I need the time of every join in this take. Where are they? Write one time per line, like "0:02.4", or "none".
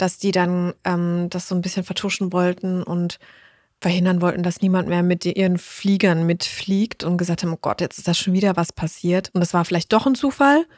none